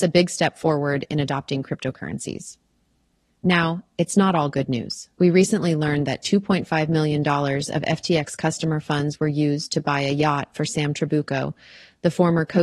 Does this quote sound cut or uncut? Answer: cut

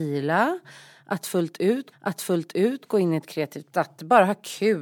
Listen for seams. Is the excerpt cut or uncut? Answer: cut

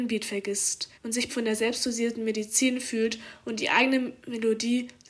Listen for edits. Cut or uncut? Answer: cut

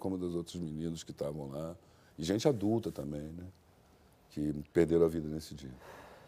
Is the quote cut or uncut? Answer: uncut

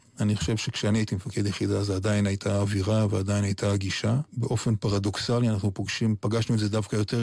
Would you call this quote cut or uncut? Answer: cut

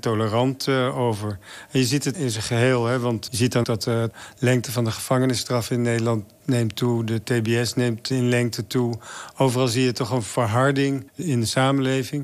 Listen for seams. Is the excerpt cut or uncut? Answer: cut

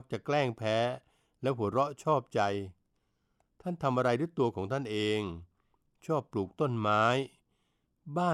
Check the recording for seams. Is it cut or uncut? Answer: uncut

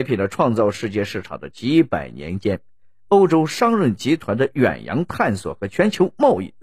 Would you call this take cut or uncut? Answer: uncut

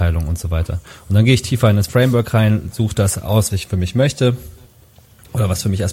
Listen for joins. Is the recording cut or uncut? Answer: cut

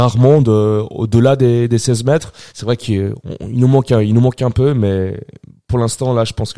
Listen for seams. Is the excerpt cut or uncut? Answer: cut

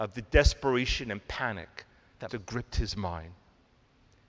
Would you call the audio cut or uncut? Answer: cut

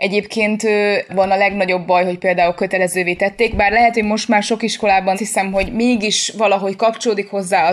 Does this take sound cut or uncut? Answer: cut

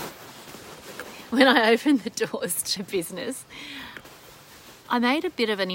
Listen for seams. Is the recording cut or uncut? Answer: cut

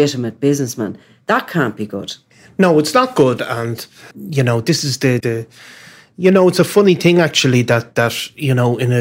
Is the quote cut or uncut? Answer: cut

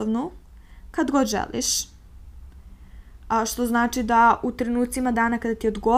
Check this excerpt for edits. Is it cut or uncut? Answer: cut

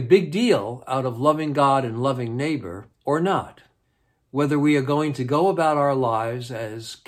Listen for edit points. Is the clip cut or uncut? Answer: cut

